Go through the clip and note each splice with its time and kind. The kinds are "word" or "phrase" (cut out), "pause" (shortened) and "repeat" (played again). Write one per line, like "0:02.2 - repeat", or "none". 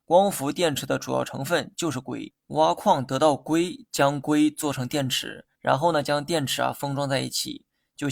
0:02.4 - pause
0:05.5 - pause